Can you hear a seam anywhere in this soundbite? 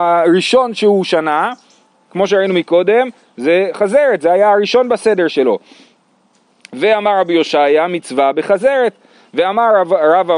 no; 0 cuts

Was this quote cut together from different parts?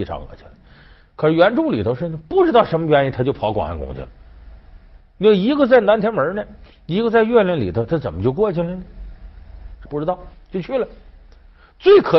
no; 0 cuts

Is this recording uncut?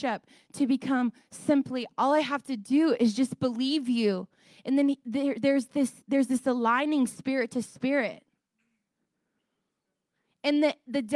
yes; 0 cuts

